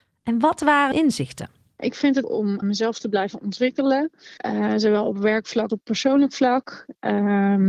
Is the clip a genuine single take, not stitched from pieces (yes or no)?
no